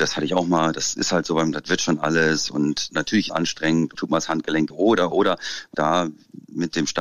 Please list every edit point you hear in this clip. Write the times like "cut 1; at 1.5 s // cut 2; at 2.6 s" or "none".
cut 1; at 1.5 s // cut 2; at 3.3 s // cut 3; at 4.0 s // cut 4; at 4.7 s // cut 5; at 5.1 s // cut 6; at 5.7 s